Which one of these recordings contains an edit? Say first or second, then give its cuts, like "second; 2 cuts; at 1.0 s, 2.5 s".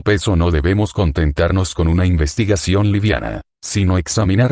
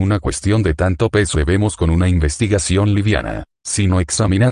second; 2 cuts; at 1.3 s, 1.8 s